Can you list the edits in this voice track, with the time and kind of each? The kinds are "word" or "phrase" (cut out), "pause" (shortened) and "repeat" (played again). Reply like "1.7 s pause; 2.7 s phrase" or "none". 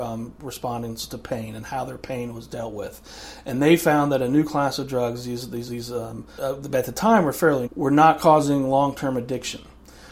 5.7 s word; 6.4 s word; 7.7 s word